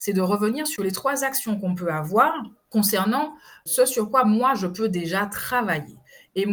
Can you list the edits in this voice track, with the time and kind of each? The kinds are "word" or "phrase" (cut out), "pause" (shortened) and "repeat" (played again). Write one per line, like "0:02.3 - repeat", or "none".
none